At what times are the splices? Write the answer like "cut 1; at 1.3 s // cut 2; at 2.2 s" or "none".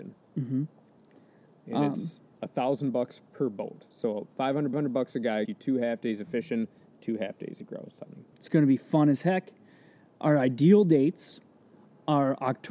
cut 1; at 4.7 s // cut 2; at 5.5 s // cut 3; at 8.3 s